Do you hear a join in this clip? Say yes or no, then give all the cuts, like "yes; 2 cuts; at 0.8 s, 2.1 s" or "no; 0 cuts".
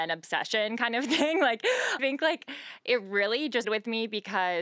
yes; 2 cuts; at 2.0 s, 3.6 s